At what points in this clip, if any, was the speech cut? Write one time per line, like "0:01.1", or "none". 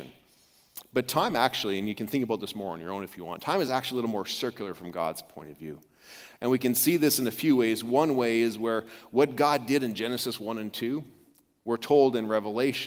none